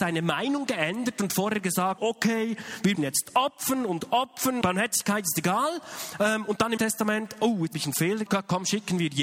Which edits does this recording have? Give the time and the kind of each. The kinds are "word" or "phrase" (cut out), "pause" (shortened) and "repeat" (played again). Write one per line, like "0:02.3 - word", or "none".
0:02.0 - word
0:02.9 - word
0:04.6 - word
0:06.8 - word
0:07.7 - word
0:08.3 - word